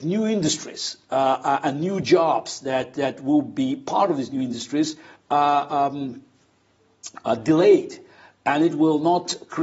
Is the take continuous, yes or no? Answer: yes